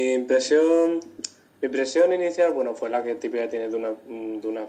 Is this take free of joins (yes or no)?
yes